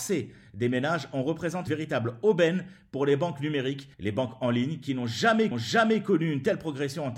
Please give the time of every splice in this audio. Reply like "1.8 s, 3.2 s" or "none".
1.7 s, 3.9 s, 5.5 s